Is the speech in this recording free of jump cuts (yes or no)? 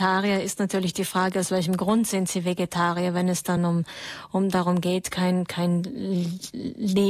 yes